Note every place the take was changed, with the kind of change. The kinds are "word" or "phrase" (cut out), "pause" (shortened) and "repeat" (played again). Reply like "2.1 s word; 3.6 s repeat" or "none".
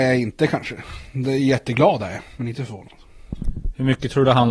none